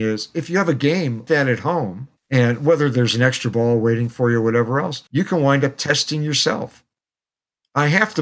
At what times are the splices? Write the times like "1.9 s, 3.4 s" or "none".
1.3 s, 2.2 s, 5.1 s